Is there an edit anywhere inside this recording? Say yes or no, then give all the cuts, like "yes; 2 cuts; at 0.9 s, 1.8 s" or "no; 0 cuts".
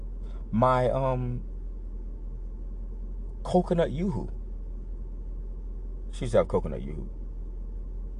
no; 0 cuts